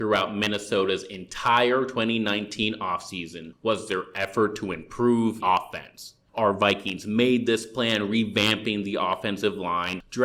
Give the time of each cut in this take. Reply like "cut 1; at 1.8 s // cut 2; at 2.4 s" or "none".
cut 1; at 5.4 s